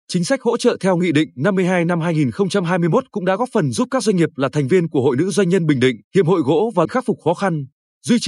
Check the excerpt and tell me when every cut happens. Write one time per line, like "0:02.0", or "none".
0:06.0
0:06.8